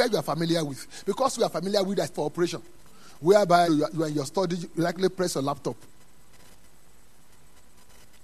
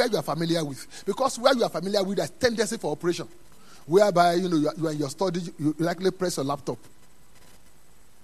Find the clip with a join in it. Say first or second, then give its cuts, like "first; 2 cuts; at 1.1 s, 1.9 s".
first; 4 cuts; at 1.4 s, 2.1 s, 3.7 s, 4.7 s